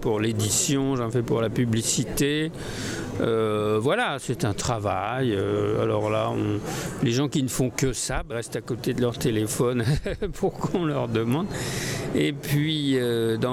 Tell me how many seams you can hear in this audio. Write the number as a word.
one